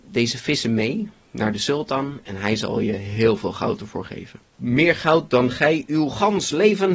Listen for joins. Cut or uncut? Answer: uncut